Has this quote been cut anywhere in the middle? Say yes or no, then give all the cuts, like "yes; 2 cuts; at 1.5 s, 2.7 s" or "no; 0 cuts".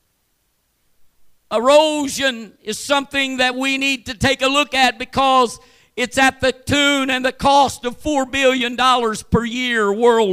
no; 0 cuts